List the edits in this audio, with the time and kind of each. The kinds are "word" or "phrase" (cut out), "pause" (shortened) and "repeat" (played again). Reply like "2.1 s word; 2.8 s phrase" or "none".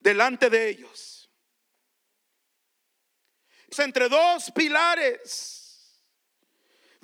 3.7 s phrase